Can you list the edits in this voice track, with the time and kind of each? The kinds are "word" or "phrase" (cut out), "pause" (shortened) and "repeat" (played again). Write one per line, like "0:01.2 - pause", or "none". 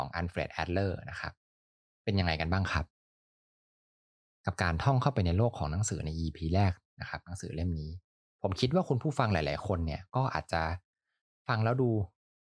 0:08.1 - pause